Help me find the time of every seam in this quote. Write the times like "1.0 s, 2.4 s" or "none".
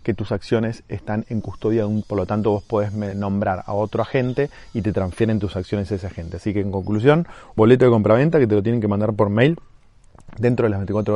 2.0 s, 3.1 s, 7.6 s